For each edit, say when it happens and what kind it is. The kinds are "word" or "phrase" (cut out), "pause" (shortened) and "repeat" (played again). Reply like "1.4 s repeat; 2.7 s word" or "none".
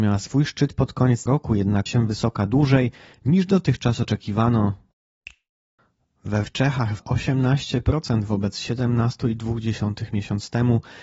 1.3 s word; 1.9 s word; 6.4 s phrase; 7.0 s word